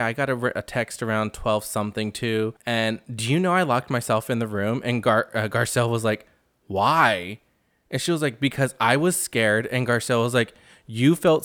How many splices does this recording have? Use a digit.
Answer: 1